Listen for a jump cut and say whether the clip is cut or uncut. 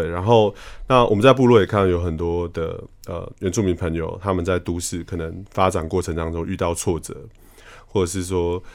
uncut